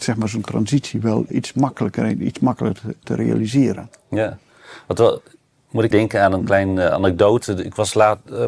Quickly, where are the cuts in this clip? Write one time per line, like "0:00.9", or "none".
0:01.3
0:03.0
0:05.9